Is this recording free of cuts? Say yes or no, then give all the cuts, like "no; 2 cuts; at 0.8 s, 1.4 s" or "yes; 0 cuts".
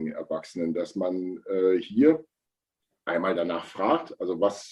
yes; 0 cuts